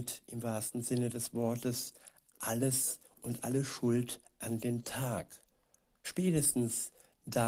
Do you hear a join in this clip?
no; 0 cuts

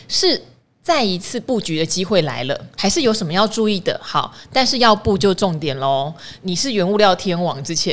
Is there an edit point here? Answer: yes; 1 cut; at 2.7 s

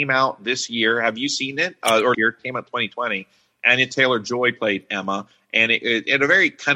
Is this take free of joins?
no; 1 cut; at 2.1 s

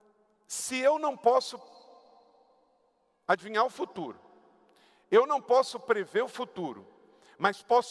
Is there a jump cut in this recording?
no; 0 cuts

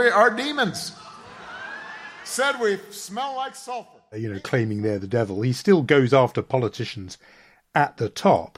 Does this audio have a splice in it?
no; 0 cuts

